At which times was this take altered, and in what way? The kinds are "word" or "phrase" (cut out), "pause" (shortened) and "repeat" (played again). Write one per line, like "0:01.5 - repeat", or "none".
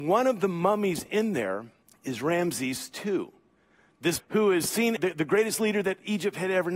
0:01.8 - pause
0:04.2 - word
0:05.0 - phrase